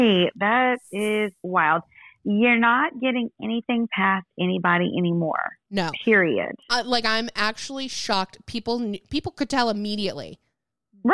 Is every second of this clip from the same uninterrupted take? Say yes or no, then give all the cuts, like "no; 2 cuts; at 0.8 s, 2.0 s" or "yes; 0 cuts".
yes; 0 cuts